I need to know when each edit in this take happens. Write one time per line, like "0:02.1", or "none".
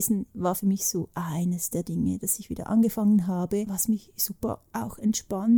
none